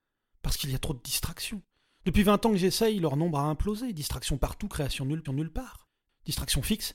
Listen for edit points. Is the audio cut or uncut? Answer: cut